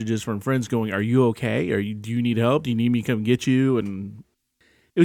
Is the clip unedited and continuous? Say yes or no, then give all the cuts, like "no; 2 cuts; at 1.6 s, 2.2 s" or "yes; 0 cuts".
yes; 0 cuts